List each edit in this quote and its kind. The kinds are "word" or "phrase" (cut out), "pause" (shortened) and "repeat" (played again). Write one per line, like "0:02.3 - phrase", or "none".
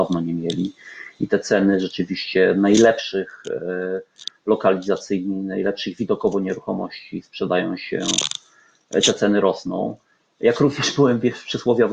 none